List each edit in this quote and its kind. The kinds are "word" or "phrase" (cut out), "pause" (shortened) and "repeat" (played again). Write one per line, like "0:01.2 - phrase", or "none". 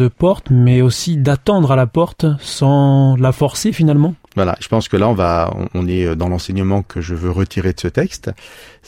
none